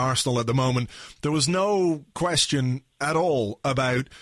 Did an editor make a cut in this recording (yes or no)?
no